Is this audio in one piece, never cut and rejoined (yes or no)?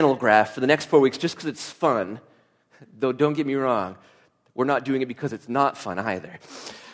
yes